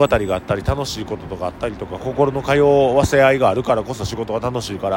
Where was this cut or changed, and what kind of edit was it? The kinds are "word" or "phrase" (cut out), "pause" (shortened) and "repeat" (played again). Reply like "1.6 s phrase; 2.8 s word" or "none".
none